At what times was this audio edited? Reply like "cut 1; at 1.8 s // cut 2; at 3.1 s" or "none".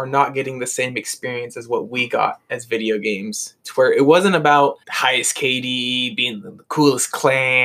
cut 1; at 4.8 s